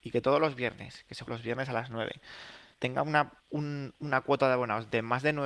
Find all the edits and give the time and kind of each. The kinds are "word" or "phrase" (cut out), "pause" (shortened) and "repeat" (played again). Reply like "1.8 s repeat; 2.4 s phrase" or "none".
1.3 s word; 2.7 s pause; 3.4 s pause